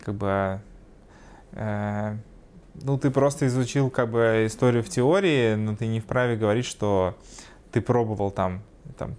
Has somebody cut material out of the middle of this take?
no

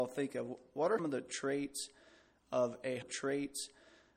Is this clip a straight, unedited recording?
no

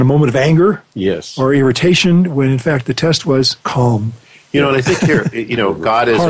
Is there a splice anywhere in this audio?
yes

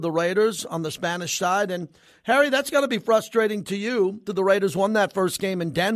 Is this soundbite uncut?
no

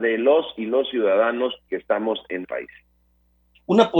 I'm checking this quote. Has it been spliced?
yes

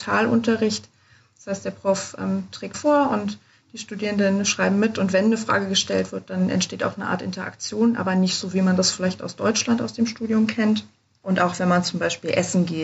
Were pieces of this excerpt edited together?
yes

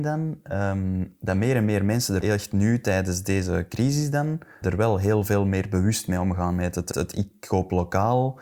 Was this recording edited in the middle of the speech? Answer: yes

